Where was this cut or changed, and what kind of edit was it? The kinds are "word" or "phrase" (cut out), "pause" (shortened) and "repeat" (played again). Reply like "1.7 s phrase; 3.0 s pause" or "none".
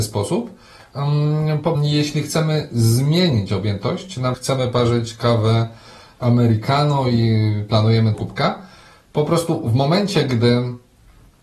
1.7 s word; 4.3 s word; 8.1 s phrase